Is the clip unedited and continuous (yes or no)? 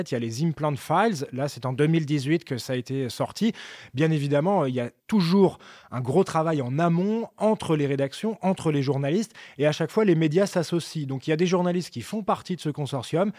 no